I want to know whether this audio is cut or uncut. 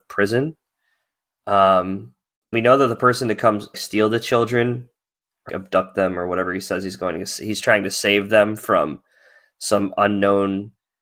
cut